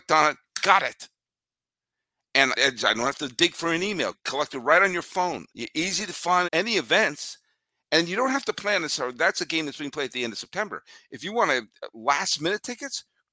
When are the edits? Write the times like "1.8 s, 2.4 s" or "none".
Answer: 2.5 s, 4.1 s, 5.5 s, 6.4 s